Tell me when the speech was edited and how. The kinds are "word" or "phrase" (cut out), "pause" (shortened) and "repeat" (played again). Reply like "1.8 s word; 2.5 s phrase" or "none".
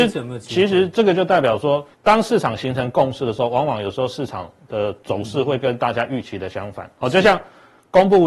1.9 s pause